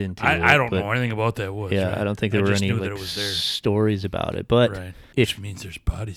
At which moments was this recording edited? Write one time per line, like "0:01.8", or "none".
none